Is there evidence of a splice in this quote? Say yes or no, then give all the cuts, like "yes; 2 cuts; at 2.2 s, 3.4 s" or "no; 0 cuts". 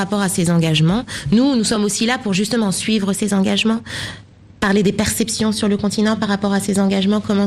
no; 0 cuts